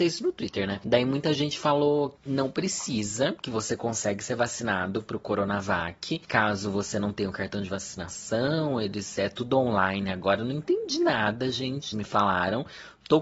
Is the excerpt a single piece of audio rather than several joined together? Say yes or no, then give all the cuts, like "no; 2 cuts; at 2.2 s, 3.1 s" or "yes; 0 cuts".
no; 2 cuts; at 2.2 s, 11.9 s